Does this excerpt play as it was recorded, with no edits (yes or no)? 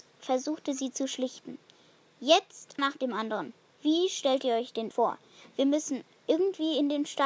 no